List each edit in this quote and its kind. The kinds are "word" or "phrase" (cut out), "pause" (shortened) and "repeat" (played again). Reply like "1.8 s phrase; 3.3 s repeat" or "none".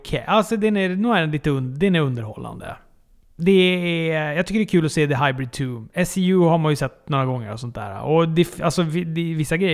none